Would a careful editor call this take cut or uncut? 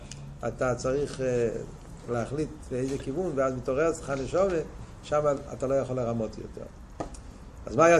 uncut